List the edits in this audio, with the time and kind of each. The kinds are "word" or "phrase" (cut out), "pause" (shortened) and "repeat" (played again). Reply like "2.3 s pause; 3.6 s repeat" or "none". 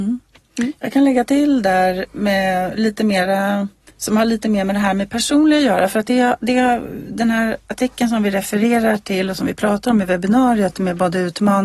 3.9 s pause